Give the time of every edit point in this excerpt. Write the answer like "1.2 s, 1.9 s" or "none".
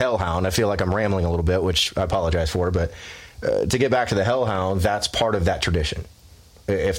none